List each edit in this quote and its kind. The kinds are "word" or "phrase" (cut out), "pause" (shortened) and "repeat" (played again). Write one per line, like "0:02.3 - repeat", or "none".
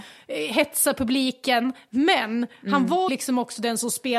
0:03.1 - word